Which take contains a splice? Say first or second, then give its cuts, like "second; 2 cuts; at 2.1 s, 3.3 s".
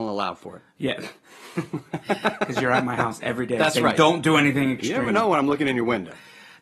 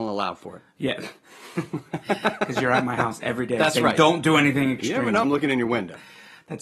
second; 1 cut; at 5.2 s